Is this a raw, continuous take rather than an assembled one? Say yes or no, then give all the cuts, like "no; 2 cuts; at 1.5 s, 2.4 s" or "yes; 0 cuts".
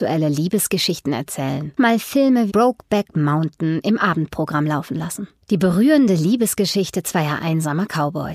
no; 2 cuts; at 1.8 s, 2.5 s